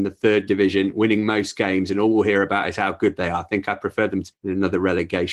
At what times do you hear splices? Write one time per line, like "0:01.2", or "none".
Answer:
0:04.3